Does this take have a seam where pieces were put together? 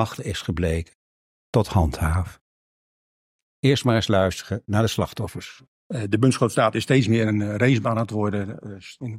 yes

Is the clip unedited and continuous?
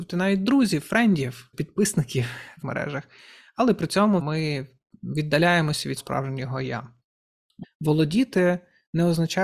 no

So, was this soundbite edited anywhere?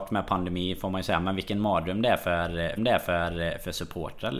yes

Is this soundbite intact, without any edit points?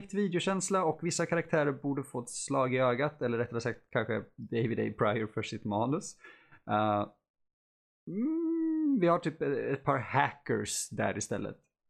yes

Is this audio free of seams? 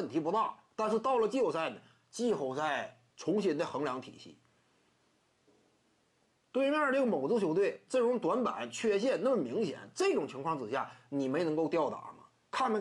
no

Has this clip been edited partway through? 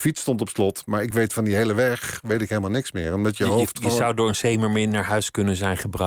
no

